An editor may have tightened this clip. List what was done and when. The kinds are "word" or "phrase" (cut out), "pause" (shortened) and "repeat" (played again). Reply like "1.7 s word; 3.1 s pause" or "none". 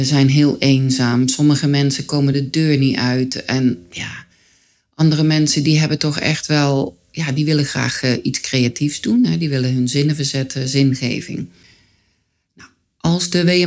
none